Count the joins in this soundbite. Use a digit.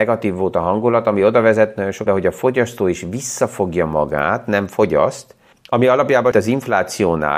3